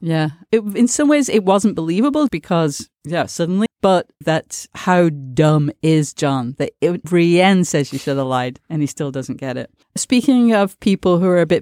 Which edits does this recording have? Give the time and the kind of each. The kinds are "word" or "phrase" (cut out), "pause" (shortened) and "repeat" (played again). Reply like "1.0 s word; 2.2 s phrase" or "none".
2.3 s word; 3.7 s word; 4.2 s word; 7.0 s word; 8.6 s pause; 9.8 s pause